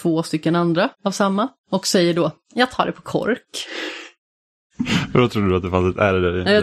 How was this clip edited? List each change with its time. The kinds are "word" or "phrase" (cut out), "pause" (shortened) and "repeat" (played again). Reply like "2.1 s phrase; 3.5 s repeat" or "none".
0.9 s pause; 1.6 s pause